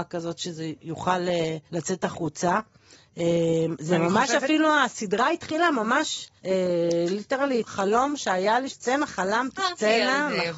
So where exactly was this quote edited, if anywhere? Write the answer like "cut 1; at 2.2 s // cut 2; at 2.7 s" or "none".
cut 1; at 1.7 s // cut 2; at 6.4 s // cut 3; at 7.6 s // cut 4; at 8.7 s // cut 5; at 9.6 s